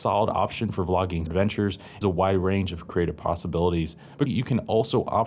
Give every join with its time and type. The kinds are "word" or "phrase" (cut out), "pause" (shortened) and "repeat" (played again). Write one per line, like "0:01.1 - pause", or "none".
0:01.3 - word
0:02.0 - phrase
0:04.3 - word